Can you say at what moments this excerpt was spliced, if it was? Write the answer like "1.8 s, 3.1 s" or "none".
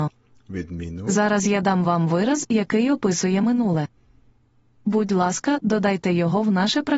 none